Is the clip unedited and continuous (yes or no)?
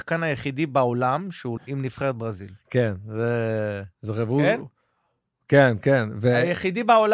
no